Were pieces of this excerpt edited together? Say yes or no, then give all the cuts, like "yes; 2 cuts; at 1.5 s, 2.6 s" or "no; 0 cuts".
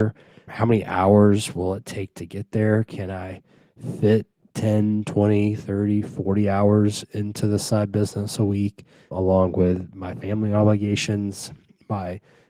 no; 0 cuts